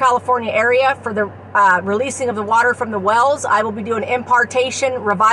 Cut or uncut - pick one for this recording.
uncut